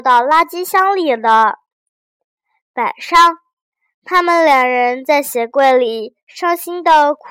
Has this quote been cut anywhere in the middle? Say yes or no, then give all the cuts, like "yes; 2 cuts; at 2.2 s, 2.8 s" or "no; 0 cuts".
no; 0 cuts